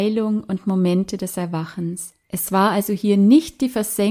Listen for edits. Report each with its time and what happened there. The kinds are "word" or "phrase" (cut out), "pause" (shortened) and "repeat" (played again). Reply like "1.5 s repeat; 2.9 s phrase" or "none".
2.2 s pause